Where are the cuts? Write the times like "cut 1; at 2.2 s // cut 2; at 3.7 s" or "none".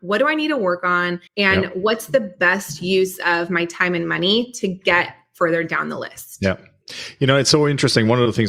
cut 1; at 1.3 s